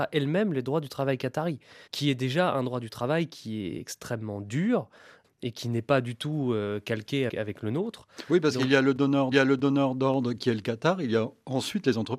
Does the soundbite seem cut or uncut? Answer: cut